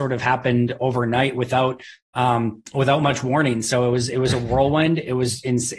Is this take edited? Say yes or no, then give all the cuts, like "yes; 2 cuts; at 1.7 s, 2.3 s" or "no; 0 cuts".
no; 0 cuts